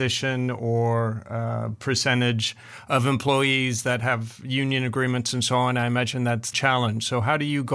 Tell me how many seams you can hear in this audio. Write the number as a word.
one